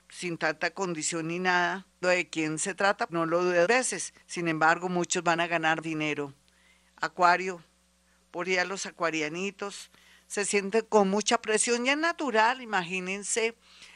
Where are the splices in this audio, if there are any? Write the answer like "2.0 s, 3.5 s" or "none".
2.0 s, 3.1 s, 3.6 s, 4.2 s, 5.4 s, 5.8 s, 8.4 s